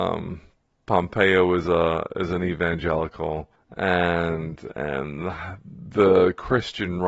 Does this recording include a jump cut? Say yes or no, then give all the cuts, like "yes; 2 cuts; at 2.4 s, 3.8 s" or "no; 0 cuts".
yes; 1 cut; at 3.6 s